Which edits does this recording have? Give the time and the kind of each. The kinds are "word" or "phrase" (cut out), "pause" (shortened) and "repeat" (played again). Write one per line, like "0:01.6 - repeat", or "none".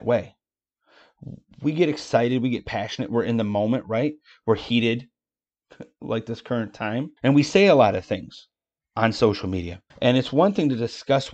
0:07.2 - pause
0:09.9 - pause